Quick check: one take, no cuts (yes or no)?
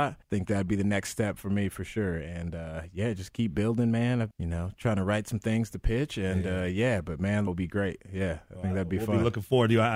no